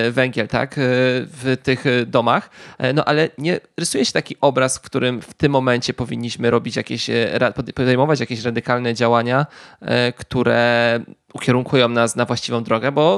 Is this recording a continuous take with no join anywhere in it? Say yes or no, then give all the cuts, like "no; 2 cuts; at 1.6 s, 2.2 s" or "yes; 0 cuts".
yes; 0 cuts